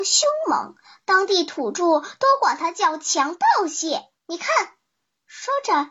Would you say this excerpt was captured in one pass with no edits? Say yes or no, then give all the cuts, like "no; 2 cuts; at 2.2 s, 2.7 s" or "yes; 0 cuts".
no; 1 cut; at 4.2 s